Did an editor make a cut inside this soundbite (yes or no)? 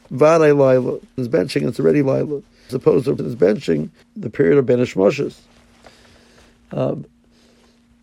yes